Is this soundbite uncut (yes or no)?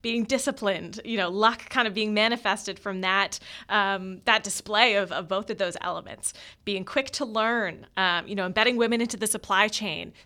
yes